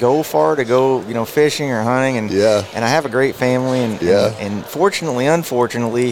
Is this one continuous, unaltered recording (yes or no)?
yes